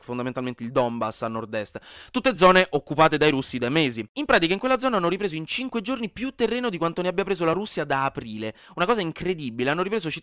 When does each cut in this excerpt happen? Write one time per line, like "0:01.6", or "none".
none